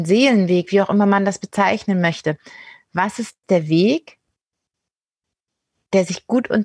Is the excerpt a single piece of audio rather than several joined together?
yes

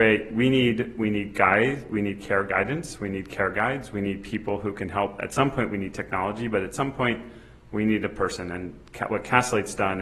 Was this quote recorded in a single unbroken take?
yes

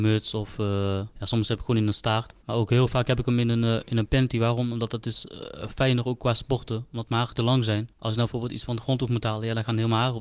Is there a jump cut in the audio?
yes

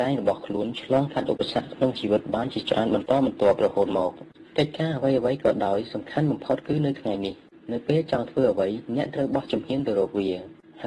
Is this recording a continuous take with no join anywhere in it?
yes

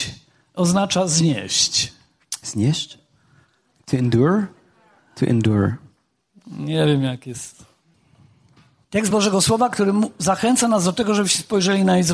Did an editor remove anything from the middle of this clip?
no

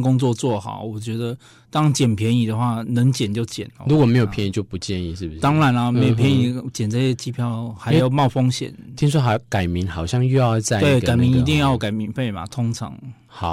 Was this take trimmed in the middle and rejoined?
no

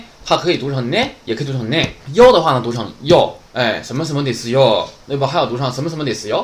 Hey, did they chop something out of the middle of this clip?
yes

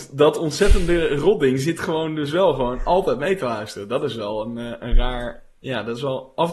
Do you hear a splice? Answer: no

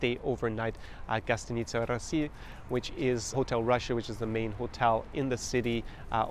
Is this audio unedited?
no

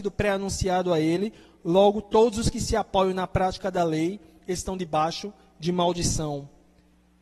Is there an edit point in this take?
no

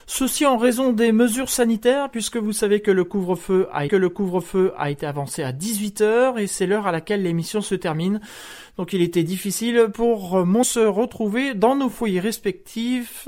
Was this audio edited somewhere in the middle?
yes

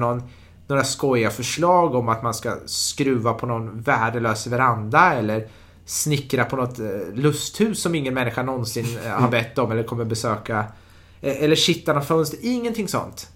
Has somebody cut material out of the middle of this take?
no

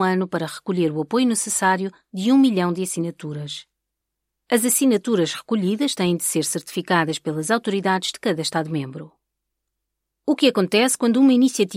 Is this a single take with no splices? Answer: yes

